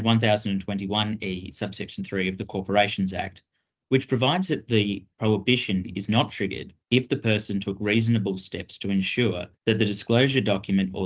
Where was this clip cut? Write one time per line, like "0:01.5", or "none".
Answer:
0:06.8
0:09.5